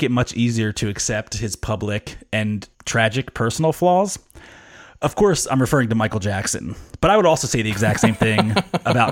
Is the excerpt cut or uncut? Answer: cut